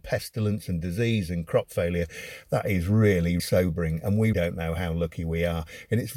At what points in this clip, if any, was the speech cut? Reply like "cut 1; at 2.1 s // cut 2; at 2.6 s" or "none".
cut 1; at 3.4 s // cut 2; at 4.3 s